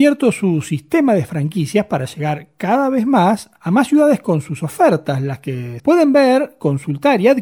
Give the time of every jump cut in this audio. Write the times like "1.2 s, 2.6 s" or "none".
5.8 s